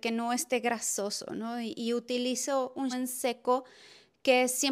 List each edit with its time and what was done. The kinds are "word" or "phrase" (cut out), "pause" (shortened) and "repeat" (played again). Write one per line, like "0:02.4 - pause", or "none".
0:02.9 - word